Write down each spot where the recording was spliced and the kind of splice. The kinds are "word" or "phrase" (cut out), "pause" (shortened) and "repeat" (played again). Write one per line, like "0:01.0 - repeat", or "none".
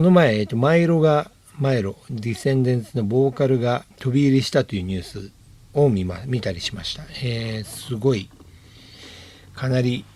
0:03.9 - pause